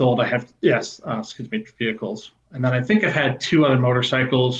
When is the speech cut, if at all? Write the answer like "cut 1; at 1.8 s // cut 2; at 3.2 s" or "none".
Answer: none